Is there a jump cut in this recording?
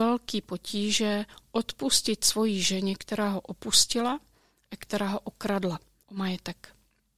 no; 0 cuts

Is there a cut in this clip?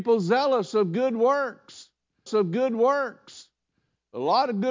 yes; 1 cut; at 2.3 s

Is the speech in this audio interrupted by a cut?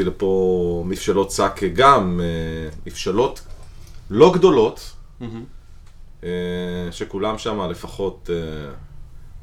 no; 0 cuts

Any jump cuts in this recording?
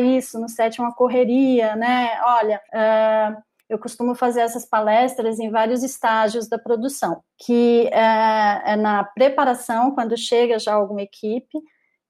yes; 2 cuts; at 2.6 s, 7.3 s

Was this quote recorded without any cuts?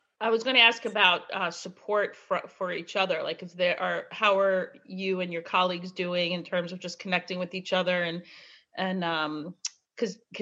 yes; 0 cuts

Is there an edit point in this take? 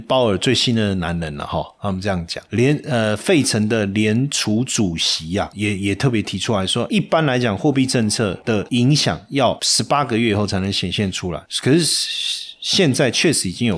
yes; 1 cut; at 6.9 s

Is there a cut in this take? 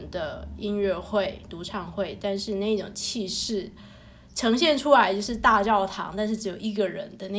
no; 0 cuts

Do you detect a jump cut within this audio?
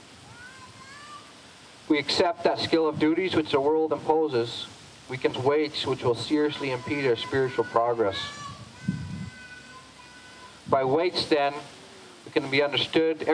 yes; 1 cut; at 5.3 s

